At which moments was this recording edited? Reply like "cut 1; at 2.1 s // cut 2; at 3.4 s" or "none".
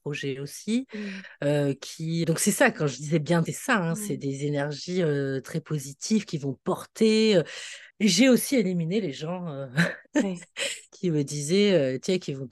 cut 1; at 2.2 s // cut 2; at 3.5 s // cut 3; at 7.9 s // cut 4; at 10.1 s // cut 5; at 10.9 s